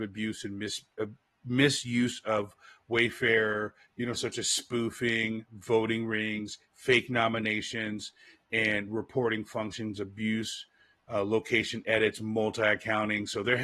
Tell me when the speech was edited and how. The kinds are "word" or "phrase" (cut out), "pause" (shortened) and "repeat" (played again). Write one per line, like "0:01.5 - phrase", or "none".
none